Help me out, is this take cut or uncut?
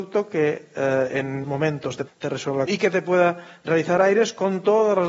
cut